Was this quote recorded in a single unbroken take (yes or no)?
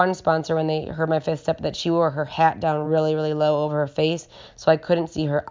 yes